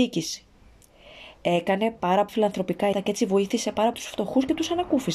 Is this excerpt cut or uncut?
cut